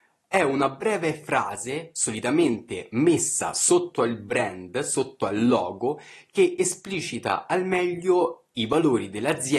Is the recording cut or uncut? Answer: uncut